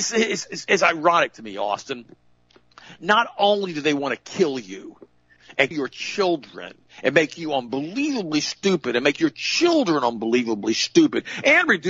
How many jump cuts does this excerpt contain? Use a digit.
1